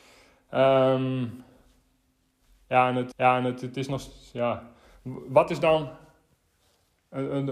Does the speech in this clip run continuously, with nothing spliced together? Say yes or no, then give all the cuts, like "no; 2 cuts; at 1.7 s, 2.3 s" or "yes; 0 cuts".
no; 1 cut; at 3.1 s